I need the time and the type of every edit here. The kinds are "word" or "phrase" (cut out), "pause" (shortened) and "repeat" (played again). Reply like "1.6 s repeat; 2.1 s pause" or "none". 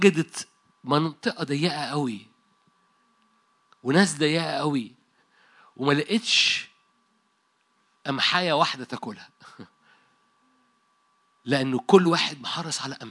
none

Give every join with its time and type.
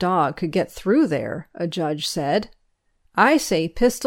none

